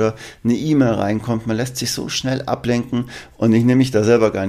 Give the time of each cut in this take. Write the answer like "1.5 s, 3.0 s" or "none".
none